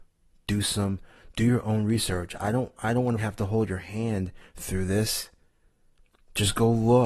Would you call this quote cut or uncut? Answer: uncut